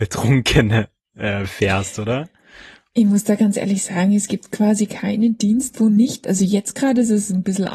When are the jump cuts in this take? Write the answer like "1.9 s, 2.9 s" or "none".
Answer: none